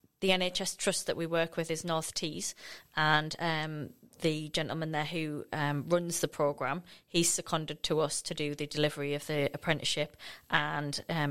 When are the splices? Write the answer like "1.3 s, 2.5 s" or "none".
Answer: none